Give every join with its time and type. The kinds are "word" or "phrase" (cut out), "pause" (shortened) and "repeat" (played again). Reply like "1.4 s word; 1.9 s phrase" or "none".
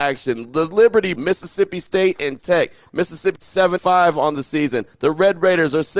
1.2 s word; 2.4 s word; 3.4 s word; 3.8 s word